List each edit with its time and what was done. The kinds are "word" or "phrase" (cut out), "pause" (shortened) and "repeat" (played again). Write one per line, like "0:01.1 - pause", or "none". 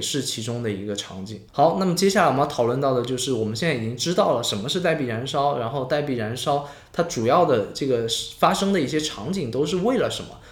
0:01.5 - pause